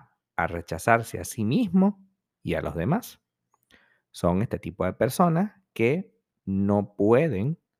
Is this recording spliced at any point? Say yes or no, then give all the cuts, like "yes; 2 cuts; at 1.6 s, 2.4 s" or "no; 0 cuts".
no; 0 cuts